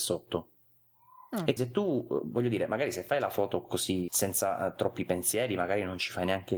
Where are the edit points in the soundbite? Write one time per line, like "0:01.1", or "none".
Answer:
0:01.6
0:04.1